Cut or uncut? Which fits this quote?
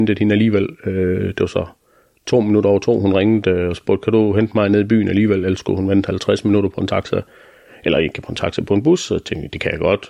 uncut